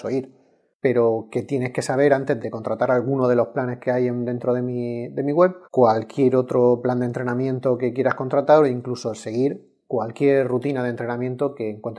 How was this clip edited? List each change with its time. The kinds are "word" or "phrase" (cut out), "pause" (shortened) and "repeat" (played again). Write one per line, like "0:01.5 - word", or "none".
0:02.4 - word
0:05.6 - pause